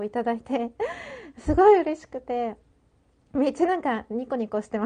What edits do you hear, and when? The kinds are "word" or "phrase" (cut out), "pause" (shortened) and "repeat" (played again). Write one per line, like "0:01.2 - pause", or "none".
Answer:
none